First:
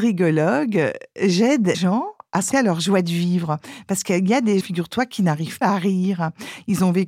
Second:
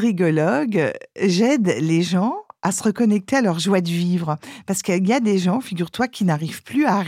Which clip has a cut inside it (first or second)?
first